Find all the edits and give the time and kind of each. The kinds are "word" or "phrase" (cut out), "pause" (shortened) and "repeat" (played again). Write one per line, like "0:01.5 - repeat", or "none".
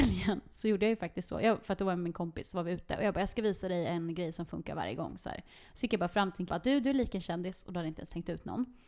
0:06.5 - word

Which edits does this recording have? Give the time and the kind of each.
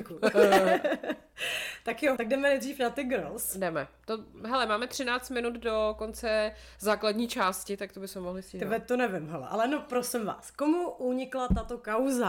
0:02.2 - word

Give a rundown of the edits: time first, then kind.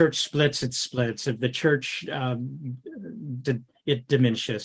0:03.4 - word

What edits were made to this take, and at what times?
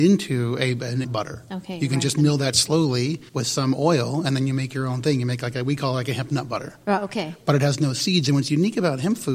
0:01.0 - word
0:03.3 - pause

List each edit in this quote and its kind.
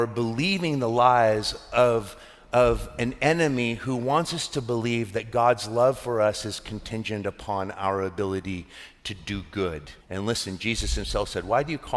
0:10.0 - pause

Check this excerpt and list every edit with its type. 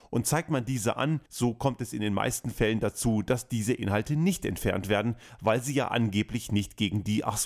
0:01.3 - pause

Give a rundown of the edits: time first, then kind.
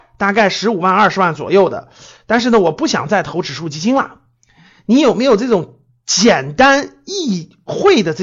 none

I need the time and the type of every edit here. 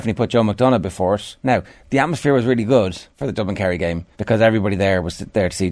0:01.4 - pause
0:03.1 - pause
0:04.1 - pause

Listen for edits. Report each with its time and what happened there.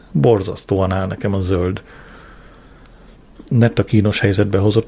none

